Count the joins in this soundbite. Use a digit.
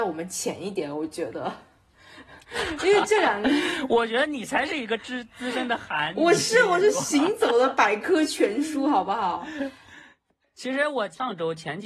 0